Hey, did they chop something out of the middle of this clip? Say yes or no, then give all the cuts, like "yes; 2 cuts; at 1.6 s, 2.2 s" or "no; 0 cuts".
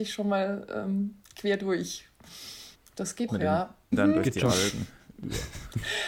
yes; 3 cuts; at 2.7 s, 3.3 s, 3.9 s